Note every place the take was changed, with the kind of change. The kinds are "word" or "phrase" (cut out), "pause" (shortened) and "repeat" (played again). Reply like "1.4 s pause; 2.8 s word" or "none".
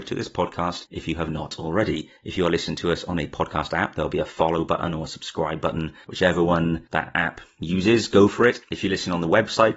2.2 s pause